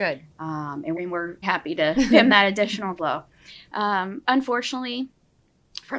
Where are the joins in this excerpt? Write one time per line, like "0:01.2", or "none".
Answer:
0:00.9
0:01.4
0:02.1
0:03.0
0:04.2